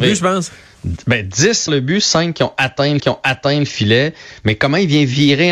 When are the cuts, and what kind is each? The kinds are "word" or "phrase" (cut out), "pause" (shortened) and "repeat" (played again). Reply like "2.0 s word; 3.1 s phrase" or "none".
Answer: 1.7 s word; 3.0 s repeat